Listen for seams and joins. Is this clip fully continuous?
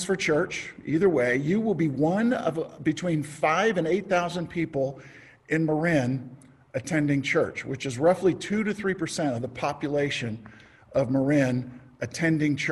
yes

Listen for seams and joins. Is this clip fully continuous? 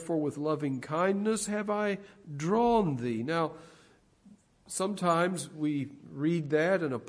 yes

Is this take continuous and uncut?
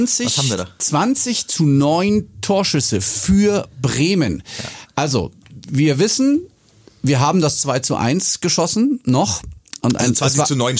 yes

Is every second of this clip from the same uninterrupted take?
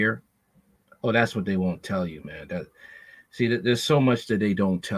yes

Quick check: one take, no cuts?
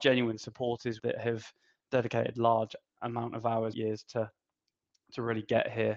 no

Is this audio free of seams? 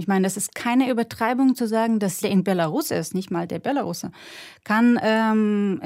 no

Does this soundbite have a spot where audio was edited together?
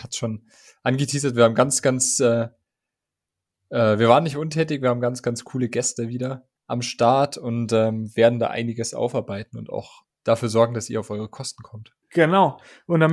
yes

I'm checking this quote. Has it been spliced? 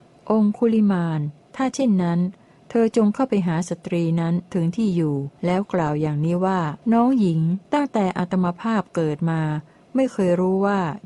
yes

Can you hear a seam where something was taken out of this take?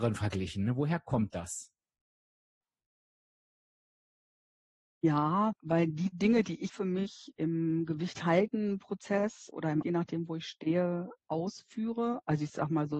yes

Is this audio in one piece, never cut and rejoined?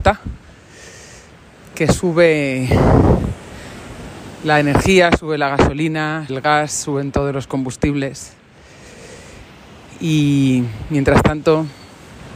no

